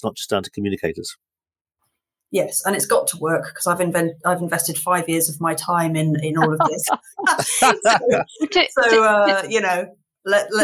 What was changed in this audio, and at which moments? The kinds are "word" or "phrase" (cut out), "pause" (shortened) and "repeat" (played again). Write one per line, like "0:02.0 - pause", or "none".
none